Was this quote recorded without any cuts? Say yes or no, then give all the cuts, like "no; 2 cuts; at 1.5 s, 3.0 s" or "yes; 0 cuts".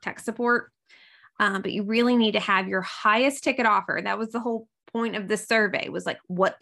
yes; 0 cuts